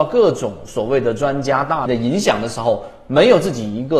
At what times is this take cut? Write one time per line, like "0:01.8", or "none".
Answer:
0:01.9